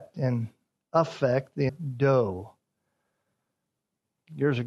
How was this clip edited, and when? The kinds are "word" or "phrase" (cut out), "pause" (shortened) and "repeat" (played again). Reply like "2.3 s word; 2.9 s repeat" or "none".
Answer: 1.7 s word